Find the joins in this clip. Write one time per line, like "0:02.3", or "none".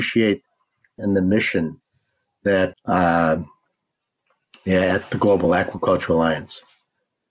0:01.0
0:02.7

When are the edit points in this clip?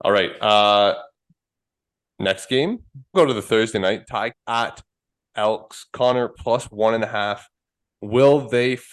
0:03.1
0:04.3
0:06.4

